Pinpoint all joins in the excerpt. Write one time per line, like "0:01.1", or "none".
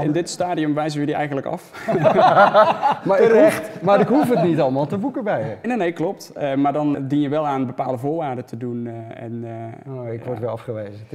0:05.6
0:06.9